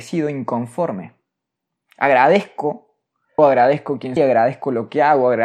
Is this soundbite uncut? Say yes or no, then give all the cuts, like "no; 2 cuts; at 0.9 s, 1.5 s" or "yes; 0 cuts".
no; 2 cuts; at 3.4 s, 4.2 s